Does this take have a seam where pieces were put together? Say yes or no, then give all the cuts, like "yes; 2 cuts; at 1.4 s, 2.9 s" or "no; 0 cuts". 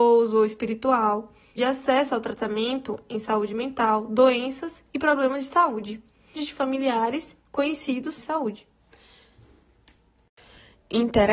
yes; 3 cuts; at 1.6 s, 6.4 s, 8.2 s